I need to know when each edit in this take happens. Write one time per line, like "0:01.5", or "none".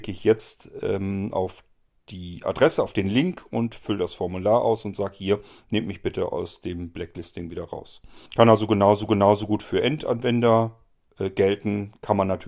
0:08.3
0:09.1